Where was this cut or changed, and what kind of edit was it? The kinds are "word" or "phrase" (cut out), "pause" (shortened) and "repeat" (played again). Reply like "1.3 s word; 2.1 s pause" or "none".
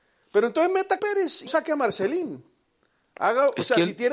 1.0 s word; 1.5 s word